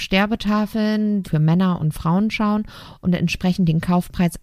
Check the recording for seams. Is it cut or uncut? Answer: cut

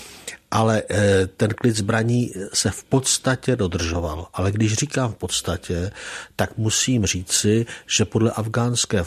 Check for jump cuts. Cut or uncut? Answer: uncut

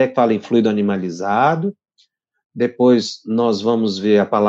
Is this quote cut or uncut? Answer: uncut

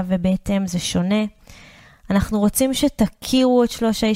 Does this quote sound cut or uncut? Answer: uncut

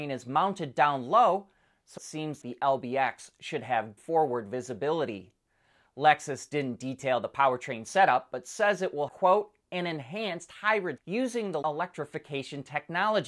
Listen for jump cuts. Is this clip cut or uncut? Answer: cut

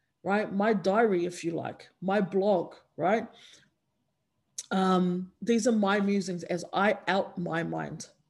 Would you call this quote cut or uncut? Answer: cut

